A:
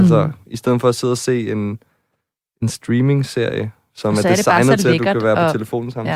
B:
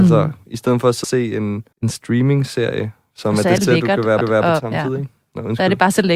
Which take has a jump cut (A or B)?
B